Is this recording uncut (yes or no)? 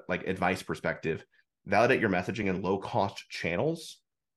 yes